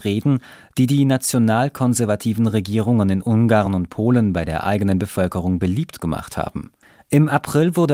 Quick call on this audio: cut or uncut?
uncut